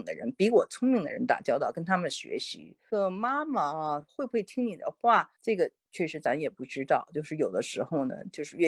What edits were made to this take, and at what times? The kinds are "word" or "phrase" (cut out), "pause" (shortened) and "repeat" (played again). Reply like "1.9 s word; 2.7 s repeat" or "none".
5.3 s pause